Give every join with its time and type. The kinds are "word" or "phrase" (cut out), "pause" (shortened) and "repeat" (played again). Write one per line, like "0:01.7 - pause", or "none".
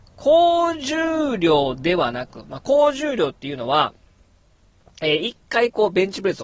none